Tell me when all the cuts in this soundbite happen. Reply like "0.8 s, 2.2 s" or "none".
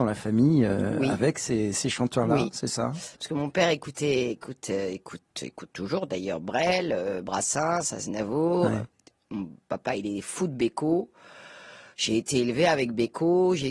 none